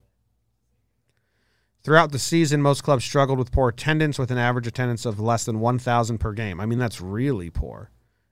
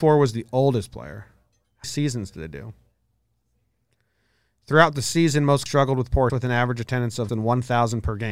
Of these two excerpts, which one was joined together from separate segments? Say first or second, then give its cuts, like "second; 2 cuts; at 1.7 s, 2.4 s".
second; 4 cuts; at 1.8 s, 5.7 s, 6.3 s, 7.3 s